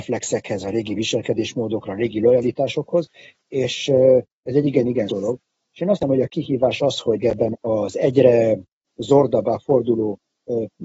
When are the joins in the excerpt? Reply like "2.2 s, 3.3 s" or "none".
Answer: 5.1 s, 6.0 s, 7.2 s, 7.5 s